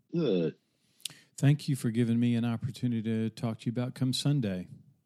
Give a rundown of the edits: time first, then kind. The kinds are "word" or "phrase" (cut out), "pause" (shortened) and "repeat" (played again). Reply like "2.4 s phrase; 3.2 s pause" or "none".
none